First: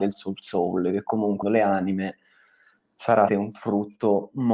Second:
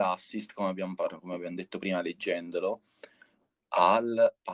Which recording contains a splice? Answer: first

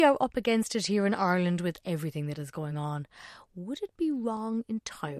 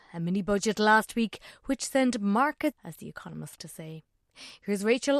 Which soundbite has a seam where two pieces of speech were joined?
second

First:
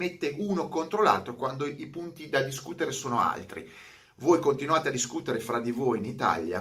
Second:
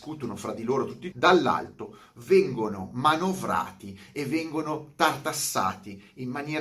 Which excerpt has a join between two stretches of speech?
second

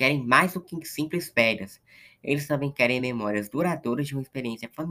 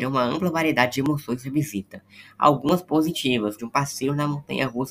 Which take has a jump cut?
second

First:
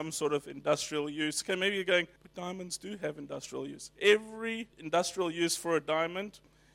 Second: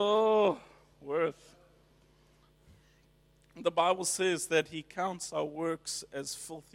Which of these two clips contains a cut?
first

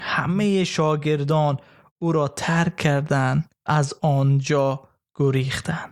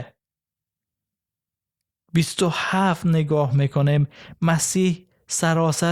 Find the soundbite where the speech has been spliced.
first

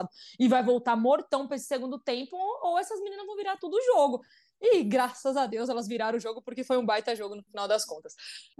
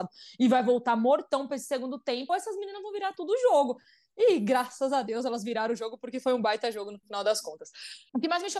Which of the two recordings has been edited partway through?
second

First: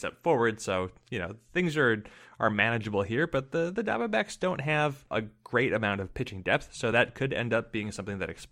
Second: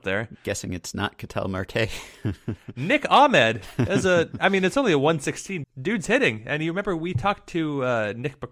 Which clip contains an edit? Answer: second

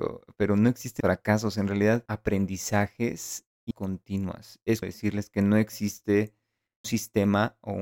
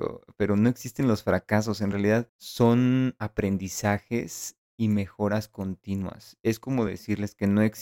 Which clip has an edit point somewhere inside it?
first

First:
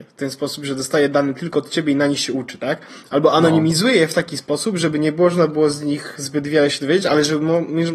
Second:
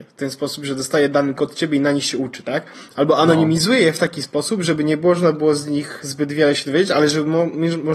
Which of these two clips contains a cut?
second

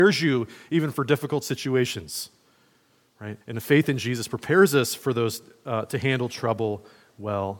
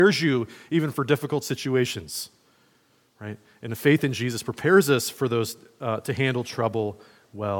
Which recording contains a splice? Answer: first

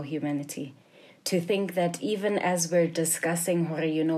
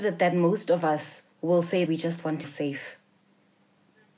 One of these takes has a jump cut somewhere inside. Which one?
second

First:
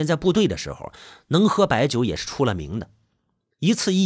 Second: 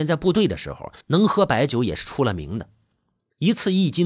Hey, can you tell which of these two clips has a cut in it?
second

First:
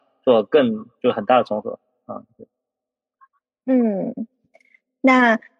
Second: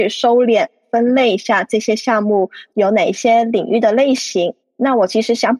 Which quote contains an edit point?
second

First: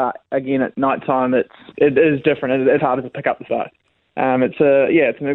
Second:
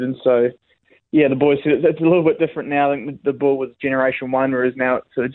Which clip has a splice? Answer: first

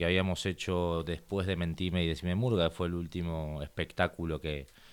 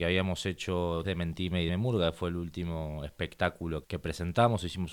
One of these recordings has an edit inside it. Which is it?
second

